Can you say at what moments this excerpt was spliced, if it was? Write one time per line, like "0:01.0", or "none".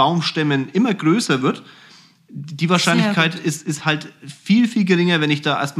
none